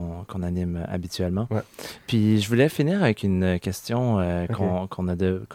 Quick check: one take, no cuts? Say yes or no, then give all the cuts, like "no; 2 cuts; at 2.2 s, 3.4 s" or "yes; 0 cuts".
yes; 0 cuts